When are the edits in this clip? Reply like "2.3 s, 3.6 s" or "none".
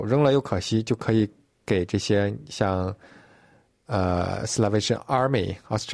none